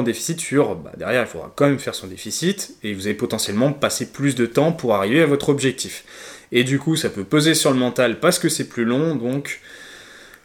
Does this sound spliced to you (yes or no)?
no